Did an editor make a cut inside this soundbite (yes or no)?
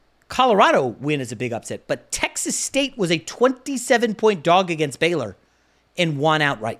no